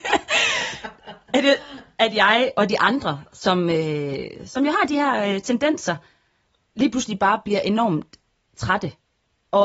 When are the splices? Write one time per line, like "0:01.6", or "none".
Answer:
none